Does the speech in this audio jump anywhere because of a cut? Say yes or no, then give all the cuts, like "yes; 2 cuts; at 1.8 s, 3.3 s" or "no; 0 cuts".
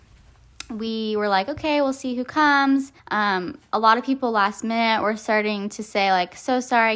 yes; 1 cut; at 3.0 s